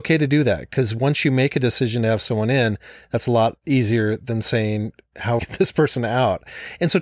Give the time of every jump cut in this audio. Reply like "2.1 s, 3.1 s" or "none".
5.4 s